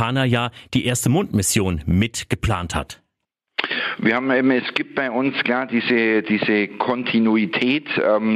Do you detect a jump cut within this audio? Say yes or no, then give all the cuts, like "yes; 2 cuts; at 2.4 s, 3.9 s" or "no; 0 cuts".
no; 0 cuts